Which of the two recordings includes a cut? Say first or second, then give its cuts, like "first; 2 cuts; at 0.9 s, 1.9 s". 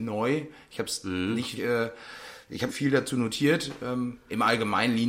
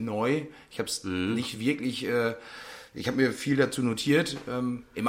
first; 2 cuts; at 1.6 s, 2.7 s